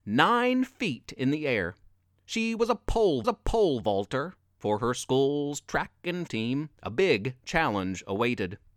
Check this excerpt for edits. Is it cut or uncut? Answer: cut